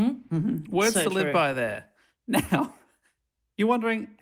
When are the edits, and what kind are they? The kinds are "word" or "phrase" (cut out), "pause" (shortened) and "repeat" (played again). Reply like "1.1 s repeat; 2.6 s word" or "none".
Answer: none